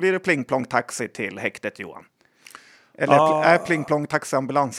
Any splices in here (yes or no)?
no